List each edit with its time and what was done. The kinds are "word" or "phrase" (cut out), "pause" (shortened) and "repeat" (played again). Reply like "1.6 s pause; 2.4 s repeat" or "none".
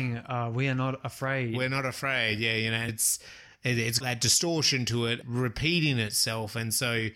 2.9 s word; 4.0 s word; 5.2 s word